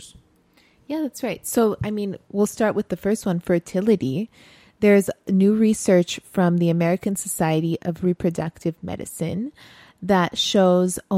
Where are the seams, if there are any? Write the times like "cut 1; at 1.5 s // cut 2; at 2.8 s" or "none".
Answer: none